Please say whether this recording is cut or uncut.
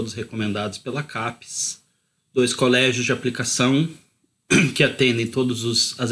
uncut